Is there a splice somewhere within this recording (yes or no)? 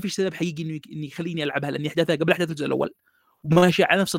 no